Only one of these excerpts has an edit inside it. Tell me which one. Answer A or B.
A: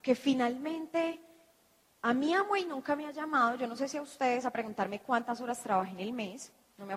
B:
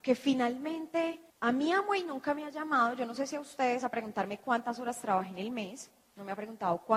B